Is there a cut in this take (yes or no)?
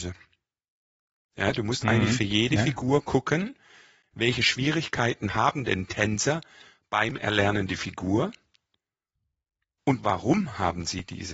no